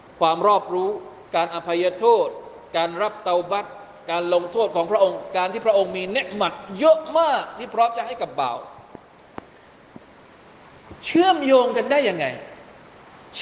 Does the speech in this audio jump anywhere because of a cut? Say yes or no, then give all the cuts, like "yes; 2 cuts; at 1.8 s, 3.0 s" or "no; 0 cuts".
yes; 1 cut; at 1.3 s